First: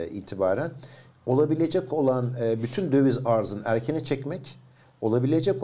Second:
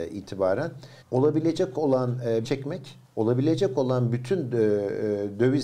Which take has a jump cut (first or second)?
second